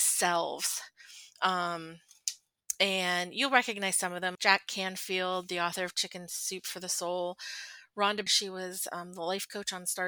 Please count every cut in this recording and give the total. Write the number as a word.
two